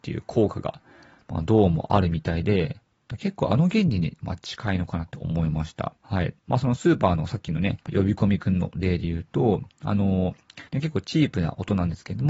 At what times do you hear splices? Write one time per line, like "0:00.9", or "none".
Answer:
0:06.0
0:06.4
0:07.8
0:09.7
0:10.7